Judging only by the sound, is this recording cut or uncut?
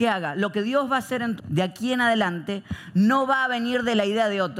cut